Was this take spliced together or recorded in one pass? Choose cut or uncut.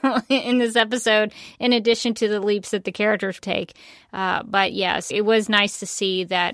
cut